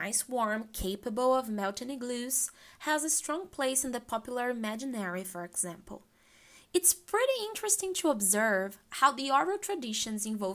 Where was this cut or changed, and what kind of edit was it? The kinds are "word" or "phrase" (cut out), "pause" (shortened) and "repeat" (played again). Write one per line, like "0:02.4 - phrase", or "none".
none